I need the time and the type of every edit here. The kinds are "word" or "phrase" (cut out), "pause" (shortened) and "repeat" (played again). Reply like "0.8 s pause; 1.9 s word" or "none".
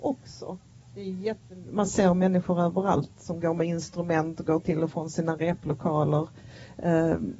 none